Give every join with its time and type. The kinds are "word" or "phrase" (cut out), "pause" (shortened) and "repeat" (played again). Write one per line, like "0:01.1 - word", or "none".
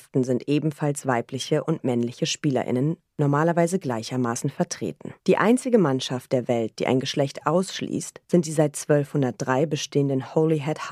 0:05.2 - pause
0:08.2 - pause